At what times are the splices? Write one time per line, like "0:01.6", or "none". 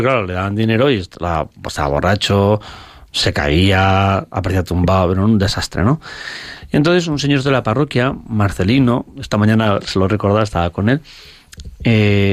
none